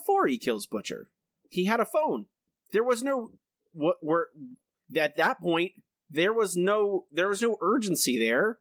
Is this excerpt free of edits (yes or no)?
yes